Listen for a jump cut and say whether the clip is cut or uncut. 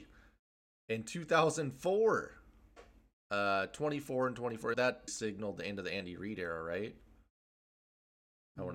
cut